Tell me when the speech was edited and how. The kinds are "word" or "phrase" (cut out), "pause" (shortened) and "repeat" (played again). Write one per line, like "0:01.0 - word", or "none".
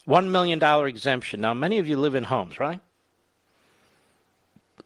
none